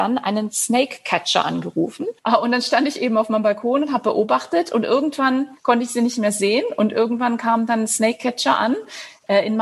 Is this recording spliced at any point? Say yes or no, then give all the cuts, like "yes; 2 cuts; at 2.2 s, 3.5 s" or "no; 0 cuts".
yes; 2 cuts; at 2.2 s, 5.6 s